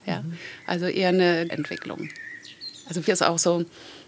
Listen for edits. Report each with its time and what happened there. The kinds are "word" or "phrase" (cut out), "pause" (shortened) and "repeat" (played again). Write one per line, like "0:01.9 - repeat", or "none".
0:01.5 - word
0:03.1 - word